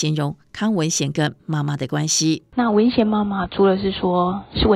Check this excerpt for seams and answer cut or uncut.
cut